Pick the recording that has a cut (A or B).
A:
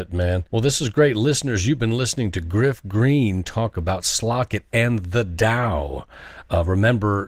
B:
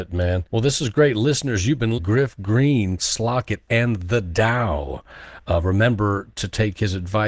B